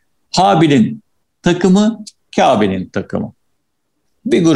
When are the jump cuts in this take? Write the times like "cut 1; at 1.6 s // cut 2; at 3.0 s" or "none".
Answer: none